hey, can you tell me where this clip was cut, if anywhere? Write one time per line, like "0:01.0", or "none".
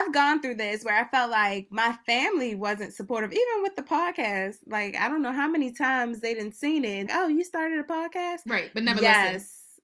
0:07.1